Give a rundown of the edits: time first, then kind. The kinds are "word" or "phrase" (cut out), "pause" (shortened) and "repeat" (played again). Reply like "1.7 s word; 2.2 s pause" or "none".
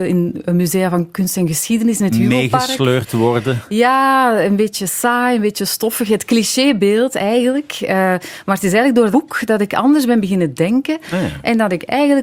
9.1 s word